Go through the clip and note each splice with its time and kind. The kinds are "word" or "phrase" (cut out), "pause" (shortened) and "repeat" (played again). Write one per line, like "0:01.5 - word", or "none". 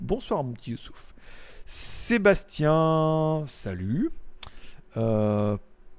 none